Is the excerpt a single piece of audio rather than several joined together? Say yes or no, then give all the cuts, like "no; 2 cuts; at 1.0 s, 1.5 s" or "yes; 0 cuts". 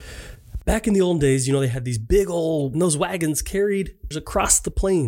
no; 2 cuts; at 2.7 s, 4.1 s